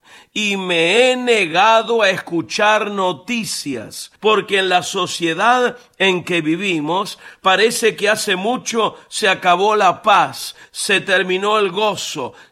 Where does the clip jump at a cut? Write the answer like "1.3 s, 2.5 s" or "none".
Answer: 4.2 s